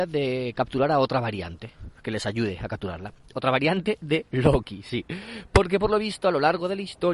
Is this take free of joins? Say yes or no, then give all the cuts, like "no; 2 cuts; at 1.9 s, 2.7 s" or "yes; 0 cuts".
yes; 0 cuts